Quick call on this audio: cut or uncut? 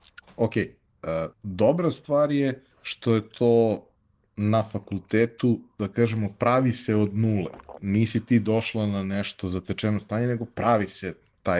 cut